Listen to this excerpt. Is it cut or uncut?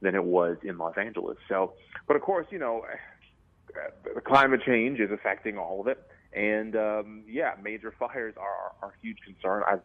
uncut